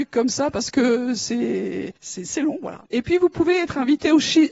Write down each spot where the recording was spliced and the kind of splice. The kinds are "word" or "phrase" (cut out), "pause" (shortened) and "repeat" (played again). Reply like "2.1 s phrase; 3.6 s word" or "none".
2.0 s pause; 2.9 s pause